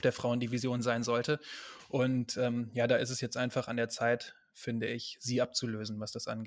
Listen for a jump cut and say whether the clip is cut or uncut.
uncut